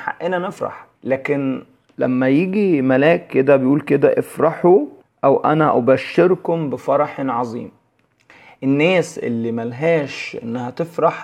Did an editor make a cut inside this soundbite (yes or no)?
yes